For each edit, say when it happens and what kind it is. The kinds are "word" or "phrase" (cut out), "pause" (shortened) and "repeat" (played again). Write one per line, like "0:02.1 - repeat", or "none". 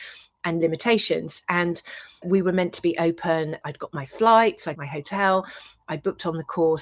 0:02.2 - word
0:03.6 - word
0:04.7 - word